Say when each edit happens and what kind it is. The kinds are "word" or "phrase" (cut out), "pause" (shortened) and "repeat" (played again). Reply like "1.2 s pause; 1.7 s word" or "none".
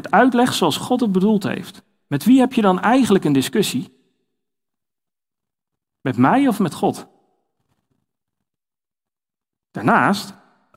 none